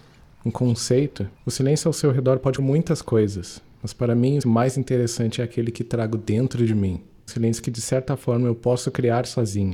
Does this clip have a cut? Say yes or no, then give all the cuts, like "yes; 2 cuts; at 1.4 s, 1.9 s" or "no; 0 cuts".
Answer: yes; 4 cuts; at 1.3 s, 2.6 s, 4.4 s, 7.3 s